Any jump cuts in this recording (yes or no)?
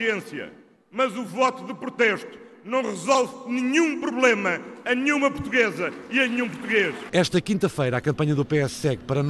no